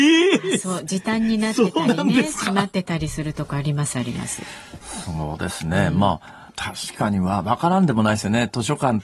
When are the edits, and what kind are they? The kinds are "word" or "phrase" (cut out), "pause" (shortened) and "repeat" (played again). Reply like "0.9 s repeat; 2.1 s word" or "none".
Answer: 6.5 s pause